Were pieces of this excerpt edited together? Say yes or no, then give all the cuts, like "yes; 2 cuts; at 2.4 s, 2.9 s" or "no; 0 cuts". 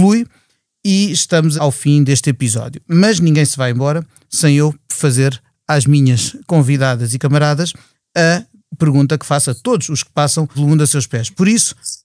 yes; 3 cuts; at 1.6 s, 7.2 s, 10.5 s